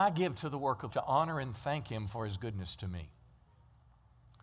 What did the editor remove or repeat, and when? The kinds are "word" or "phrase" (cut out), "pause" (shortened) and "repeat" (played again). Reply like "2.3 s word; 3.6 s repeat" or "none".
0.9 s phrase